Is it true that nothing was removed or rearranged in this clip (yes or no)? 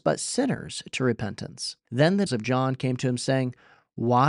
no